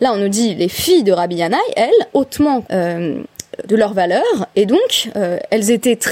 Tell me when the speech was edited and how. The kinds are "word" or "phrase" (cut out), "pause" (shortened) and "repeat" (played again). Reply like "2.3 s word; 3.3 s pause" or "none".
2.1 s word; 2.6 s word; 3.7 s word

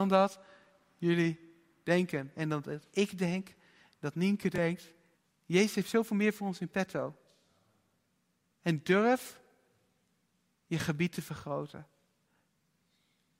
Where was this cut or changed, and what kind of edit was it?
5.1 s pause

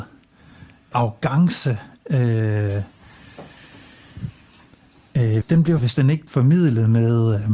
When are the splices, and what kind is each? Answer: 0.9 s word; 5.4 s word; 5.8 s word; 6.3 s word

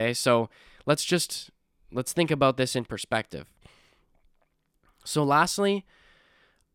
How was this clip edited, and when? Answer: none

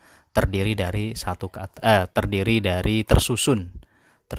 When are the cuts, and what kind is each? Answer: none

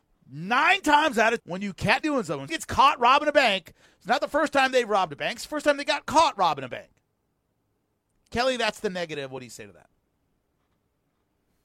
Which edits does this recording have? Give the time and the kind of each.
1.4 s word; 2.0 s word; 2.5 s word

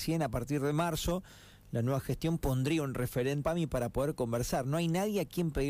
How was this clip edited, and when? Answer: 3.4 s word

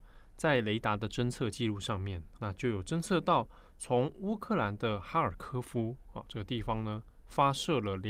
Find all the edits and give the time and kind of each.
2.4 s word

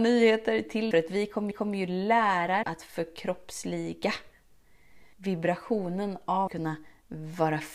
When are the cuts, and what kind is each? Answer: 0.9 s phrase; 1.5 s repeat; 2.6 s word; 5.1 s pause; 6.5 s word

